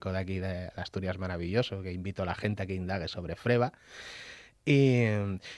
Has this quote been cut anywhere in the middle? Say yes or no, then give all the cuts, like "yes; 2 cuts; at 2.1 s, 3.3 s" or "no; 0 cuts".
no; 0 cuts